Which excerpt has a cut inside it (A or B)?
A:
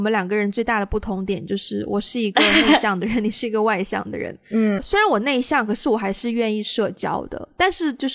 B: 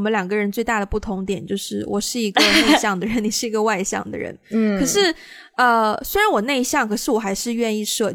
A